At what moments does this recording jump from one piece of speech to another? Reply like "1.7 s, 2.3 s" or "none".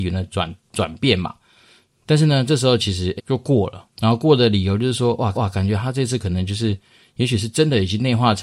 3.2 s, 3.9 s, 5.3 s